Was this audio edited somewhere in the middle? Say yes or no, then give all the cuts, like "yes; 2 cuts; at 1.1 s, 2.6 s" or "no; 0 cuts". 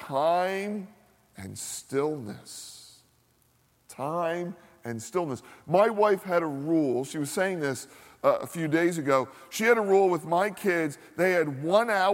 no; 0 cuts